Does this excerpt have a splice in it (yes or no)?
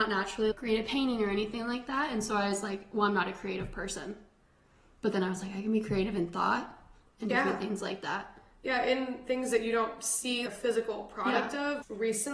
no